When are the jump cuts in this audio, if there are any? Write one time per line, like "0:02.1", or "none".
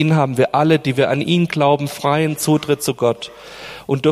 none

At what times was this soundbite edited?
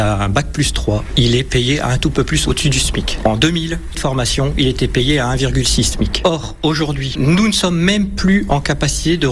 0:02.1
0:03.9

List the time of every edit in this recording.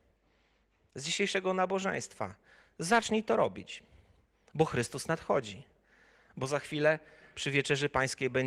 none

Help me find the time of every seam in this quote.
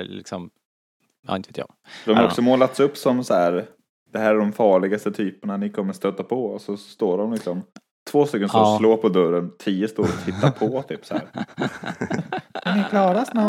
none

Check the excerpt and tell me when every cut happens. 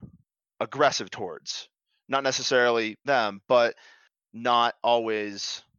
0:03.1

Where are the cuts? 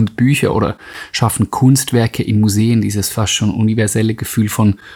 none

